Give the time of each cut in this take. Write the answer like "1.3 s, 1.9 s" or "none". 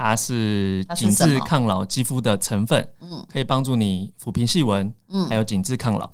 none

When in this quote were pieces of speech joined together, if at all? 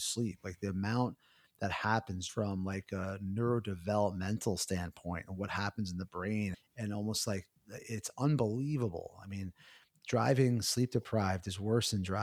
2.3 s, 6.5 s, 7.6 s

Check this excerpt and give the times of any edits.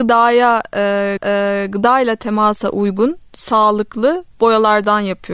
1.2 s

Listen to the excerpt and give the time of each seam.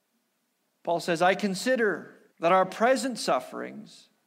2.3 s

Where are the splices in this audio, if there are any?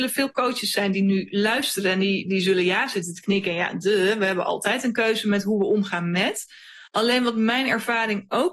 6.9 s

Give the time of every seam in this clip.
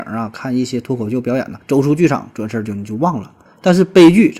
1.6 s, 3.5 s

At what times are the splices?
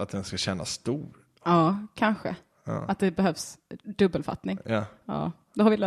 none

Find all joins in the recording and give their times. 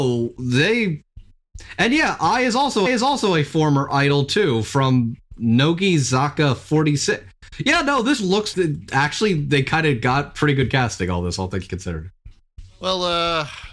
2.9 s, 8.2 s, 8.5 s

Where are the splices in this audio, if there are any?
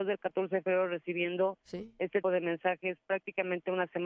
2.2 s

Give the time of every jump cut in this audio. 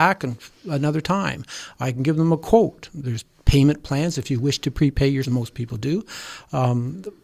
5.2 s

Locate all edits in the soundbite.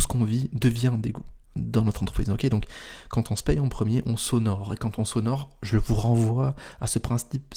none

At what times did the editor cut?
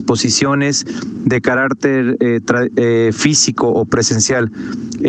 none

